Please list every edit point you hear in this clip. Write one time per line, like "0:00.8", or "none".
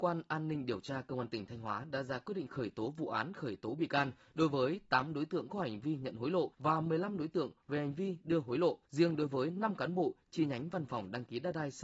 0:06.5
0:08.8